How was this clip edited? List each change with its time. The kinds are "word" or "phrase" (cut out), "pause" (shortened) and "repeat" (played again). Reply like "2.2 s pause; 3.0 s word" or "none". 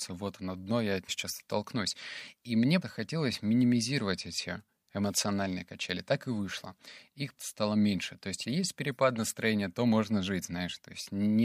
1.1 s word; 2.8 s word; 7.4 s word; 8.4 s word